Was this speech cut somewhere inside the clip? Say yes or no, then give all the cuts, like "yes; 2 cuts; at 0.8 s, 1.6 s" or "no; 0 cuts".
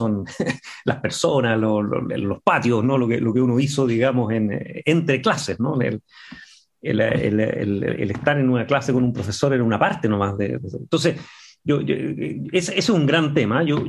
no; 0 cuts